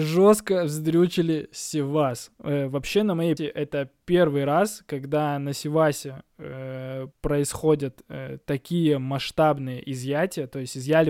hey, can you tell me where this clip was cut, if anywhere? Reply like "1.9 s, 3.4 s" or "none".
3.4 s, 7.1 s